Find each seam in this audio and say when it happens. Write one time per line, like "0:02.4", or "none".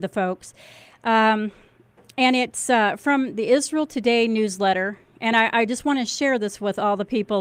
none